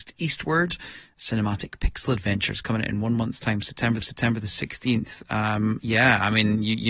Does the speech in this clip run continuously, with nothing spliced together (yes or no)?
no